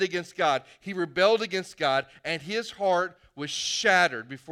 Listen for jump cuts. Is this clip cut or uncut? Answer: uncut